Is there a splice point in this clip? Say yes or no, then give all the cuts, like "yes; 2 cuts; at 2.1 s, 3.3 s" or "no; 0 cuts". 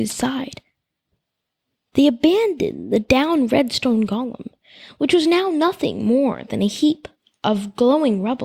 no; 0 cuts